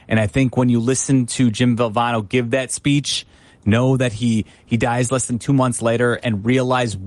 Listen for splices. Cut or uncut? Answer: uncut